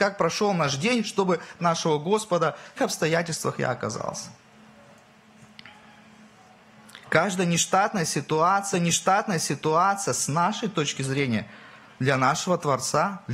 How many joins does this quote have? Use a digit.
4